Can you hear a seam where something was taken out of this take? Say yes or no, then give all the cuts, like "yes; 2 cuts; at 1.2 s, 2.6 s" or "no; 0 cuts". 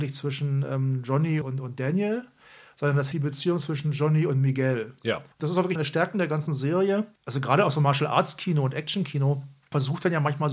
yes; 4 cuts; at 1.4 s, 3.1 s, 5.3 s, 5.7 s